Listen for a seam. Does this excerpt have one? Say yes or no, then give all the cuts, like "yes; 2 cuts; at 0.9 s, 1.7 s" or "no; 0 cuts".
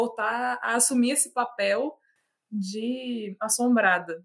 no; 0 cuts